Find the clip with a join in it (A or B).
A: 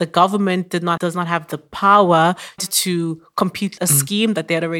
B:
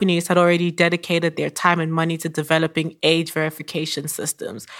A